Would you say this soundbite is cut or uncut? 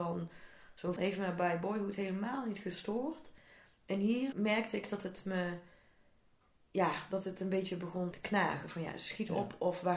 cut